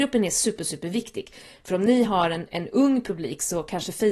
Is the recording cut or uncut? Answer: uncut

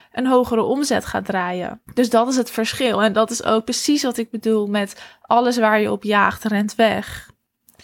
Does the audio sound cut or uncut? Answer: cut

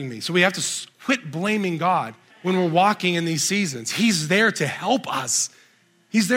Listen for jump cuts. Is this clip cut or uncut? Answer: cut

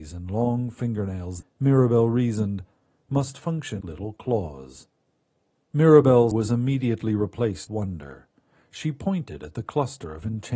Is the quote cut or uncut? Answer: cut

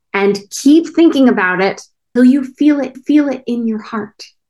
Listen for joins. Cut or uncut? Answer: cut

